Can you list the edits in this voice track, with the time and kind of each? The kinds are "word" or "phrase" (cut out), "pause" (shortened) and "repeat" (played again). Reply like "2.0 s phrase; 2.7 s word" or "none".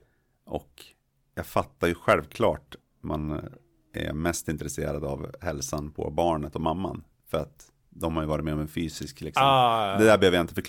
2.8 s word